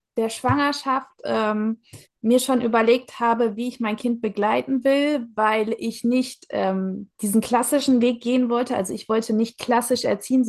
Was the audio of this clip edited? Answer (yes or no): yes